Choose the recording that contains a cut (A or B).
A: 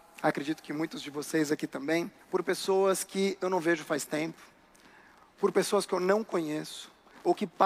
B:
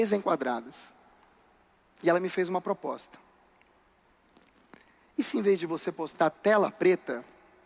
A